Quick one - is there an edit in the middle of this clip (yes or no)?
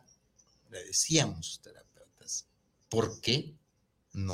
no